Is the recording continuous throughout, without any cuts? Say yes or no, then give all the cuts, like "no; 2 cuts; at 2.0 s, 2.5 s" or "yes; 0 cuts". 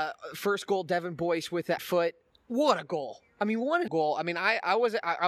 no; 2 cuts; at 1.8 s, 3.9 s